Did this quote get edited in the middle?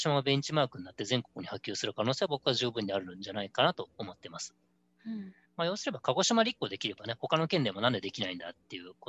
yes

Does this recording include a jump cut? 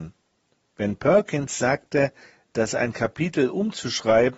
no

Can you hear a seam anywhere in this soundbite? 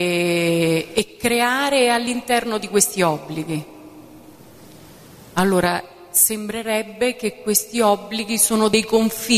yes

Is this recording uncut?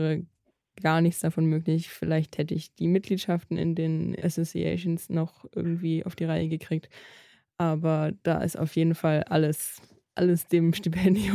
yes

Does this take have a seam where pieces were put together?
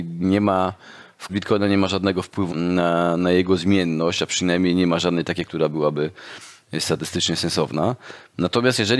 yes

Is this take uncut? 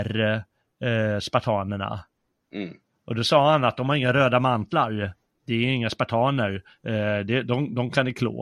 yes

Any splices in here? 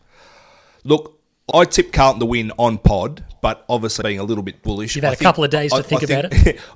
yes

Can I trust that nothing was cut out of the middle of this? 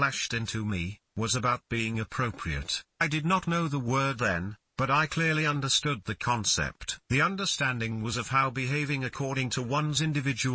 no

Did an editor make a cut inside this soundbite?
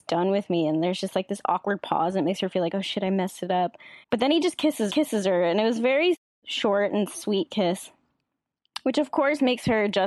yes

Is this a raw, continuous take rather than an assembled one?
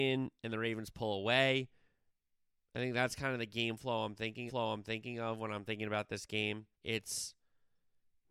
no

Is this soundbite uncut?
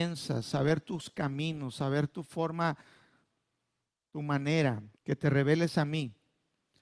no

